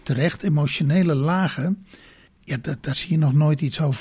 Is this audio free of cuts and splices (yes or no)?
no